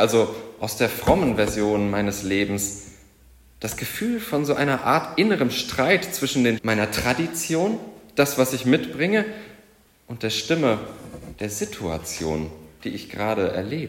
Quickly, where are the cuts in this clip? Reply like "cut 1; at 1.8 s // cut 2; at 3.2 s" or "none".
cut 1; at 6.6 s